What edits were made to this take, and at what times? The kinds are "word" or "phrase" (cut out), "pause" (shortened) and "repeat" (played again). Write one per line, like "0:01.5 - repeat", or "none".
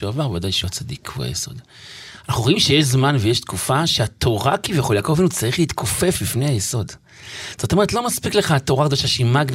none